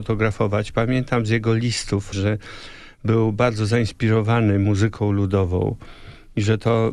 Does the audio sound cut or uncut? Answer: cut